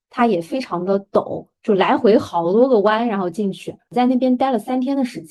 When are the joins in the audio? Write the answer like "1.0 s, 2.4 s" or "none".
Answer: none